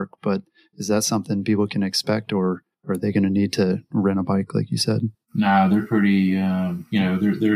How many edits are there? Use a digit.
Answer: 1